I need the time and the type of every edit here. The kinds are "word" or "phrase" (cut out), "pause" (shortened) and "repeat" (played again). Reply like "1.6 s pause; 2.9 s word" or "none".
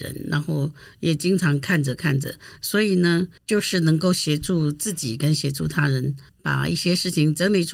3.4 s pause; 6.3 s pause

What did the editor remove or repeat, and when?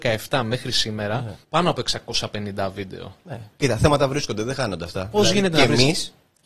1.4 s pause

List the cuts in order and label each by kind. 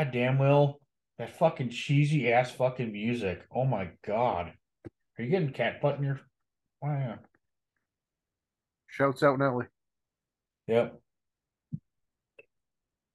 none

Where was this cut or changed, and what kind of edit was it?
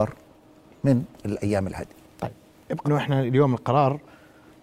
2.8 s word

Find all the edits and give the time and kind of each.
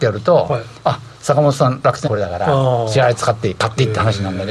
2.0 s word

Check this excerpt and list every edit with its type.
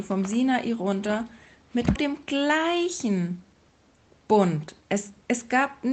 2.0 s word

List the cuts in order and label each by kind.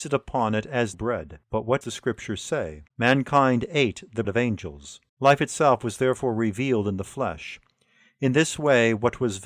0.9 s phrase; 1.4 s pause; 1.8 s word; 2.9 s pause; 4.2 s word; 5.1 s pause

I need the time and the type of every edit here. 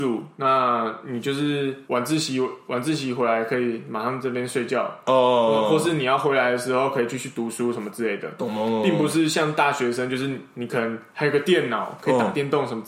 1.9 s pause

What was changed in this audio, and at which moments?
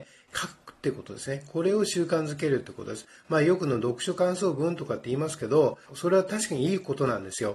5.8 s pause

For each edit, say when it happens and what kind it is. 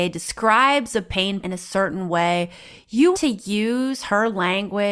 1.4 s word; 3.1 s word

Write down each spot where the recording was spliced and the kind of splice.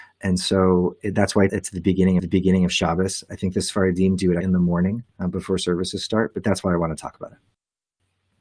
1.5 s word; 2.2 s repeat; 4.4 s word; 5.1 s pause

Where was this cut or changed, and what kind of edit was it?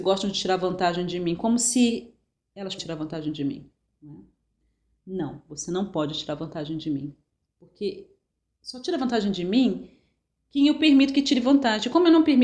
2.8 s word

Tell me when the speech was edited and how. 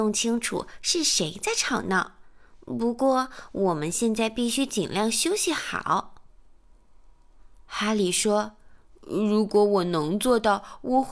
none

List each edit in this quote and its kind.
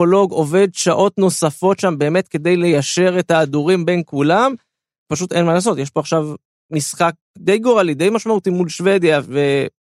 none

